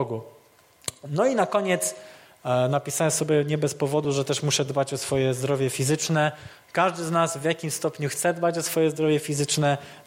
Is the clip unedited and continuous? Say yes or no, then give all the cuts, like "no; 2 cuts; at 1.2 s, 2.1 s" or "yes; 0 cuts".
yes; 0 cuts